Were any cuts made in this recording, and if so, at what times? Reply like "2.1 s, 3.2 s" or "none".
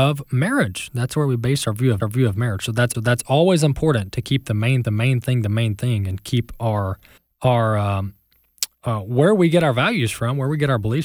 2.0 s, 2.9 s, 4.8 s, 7.2 s, 8.7 s